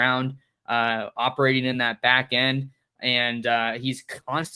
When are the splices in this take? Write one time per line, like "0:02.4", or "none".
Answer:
none